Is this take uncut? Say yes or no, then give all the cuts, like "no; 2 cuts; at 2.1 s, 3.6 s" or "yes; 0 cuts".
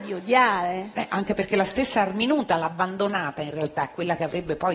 yes; 0 cuts